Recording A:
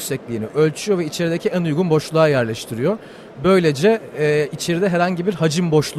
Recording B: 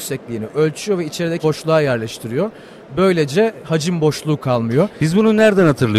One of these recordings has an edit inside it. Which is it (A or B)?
B